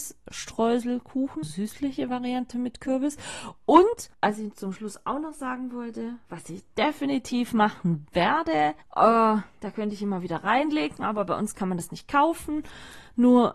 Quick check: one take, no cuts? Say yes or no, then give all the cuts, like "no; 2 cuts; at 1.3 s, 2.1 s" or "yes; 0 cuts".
no; 3 cuts; at 1.4 s, 4.1 s, 8.8 s